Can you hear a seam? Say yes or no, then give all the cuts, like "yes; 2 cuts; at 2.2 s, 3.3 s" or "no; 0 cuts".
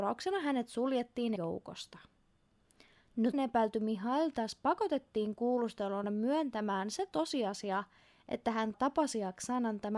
yes; 4 cuts; at 1.4 s, 3.3 s, 6.0 s, 8.7 s